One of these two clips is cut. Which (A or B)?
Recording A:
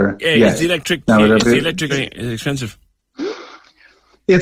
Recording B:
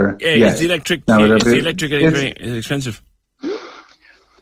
A